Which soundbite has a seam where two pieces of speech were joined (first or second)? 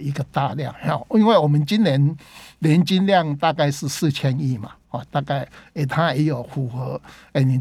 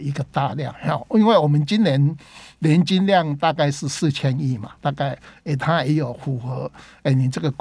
second